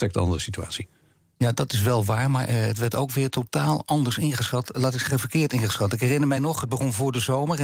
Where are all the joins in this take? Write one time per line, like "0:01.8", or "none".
none